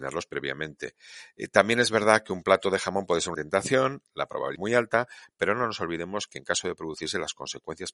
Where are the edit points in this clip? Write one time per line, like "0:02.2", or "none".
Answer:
0:03.3
0:04.5